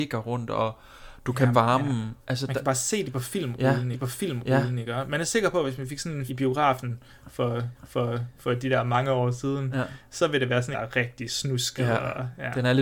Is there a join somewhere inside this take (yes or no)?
yes